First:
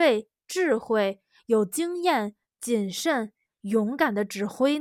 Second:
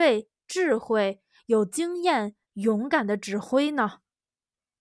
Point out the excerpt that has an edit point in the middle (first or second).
second